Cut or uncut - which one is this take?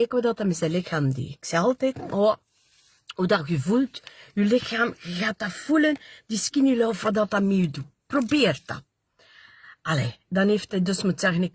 uncut